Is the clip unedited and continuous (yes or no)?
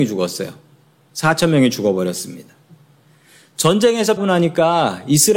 no